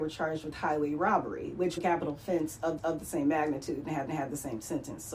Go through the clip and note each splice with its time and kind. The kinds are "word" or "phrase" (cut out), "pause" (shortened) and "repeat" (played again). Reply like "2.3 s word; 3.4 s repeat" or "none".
1.8 s word; 2.8 s repeat; 4.1 s repeat